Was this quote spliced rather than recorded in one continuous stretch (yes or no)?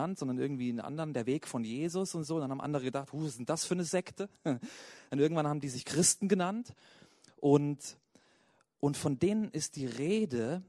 no